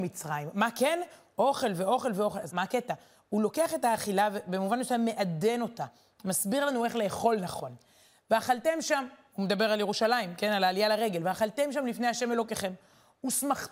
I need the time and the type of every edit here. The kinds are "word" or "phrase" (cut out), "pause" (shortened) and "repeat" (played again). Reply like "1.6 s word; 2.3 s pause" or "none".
2.5 s word